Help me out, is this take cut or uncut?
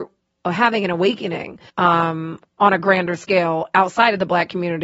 cut